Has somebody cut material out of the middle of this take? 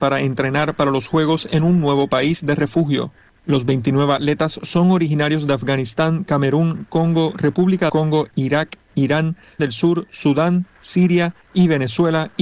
yes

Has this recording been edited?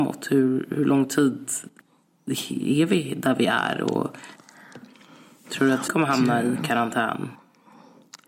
yes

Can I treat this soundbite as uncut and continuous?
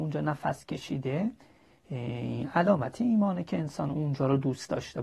yes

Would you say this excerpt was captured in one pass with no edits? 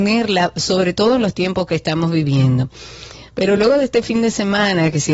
yes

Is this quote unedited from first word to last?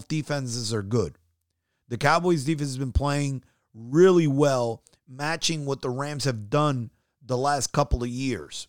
yes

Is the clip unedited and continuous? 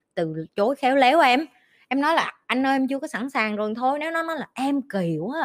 yes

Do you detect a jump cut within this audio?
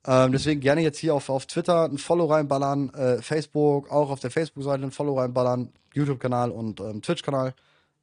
no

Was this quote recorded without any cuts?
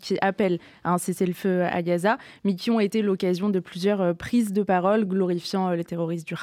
yes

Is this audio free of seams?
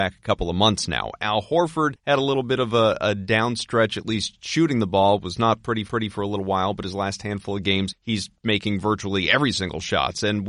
no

